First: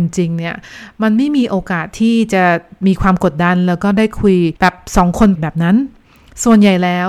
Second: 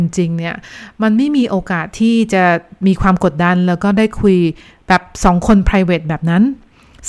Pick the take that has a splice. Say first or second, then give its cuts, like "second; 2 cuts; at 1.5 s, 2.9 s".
first; 2 cuts; at 4.6 s, 5.4 s